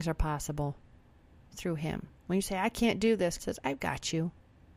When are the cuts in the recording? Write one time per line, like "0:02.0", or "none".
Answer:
0:02.2
0:03.4